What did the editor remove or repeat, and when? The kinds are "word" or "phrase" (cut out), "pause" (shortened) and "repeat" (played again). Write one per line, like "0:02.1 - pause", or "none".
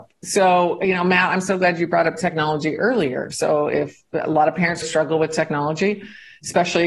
0:04.8 - word